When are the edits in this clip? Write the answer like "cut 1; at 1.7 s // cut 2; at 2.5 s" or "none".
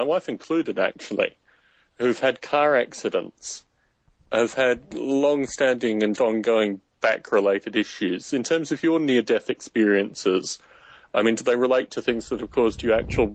cut 1; at 6.2 s

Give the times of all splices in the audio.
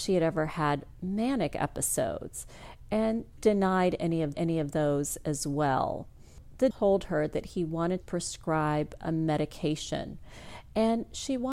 cut 1; at 3.4 s // cut 2; at 4.3 s // cut 3; at 6.7 s // cut 4; at 8.0 s

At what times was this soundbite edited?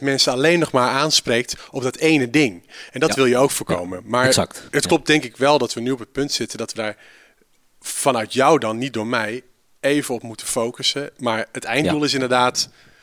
none

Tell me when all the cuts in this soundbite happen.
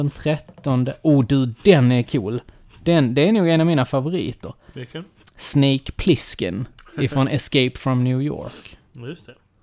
none

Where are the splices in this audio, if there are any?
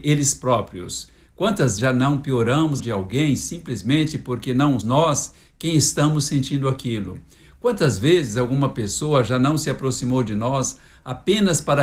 cut 1; at 1.8 s // cut 2; at 2.8 s // cut 3; at 4.8 s

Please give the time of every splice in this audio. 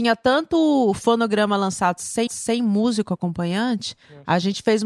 cut 1; at 2.3 s

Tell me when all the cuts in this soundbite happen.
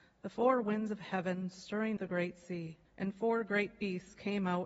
cut 1; at 2.0 s // cut 2; at 2.9 s

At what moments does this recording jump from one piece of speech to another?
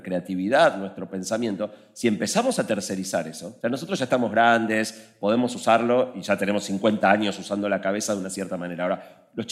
cut 1; at 3.6 s

